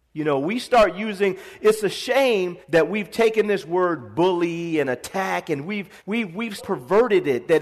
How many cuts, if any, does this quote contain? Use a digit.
3